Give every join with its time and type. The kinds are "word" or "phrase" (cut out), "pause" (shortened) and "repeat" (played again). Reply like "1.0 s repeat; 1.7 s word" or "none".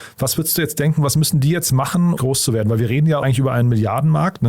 2.2 s phrase; 3.2 s word